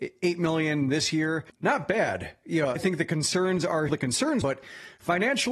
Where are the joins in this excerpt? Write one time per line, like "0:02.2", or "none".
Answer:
0:02.8
0:03.9
0:04.4